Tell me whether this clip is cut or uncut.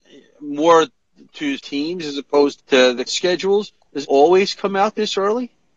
cut